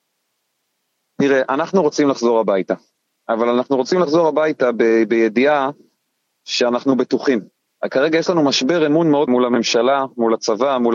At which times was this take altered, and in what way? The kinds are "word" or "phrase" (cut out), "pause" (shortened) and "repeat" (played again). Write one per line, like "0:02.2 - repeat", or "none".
0:09.3 - word